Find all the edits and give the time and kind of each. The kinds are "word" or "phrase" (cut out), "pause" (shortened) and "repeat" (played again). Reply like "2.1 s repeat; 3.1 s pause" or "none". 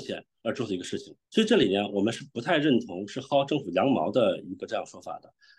1.2 s pause